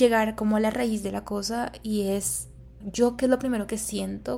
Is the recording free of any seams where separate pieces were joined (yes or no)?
no